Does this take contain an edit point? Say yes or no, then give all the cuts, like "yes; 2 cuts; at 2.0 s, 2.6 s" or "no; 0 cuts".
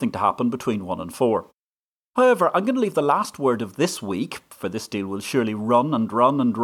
yes; 1 cut; at 1.9 s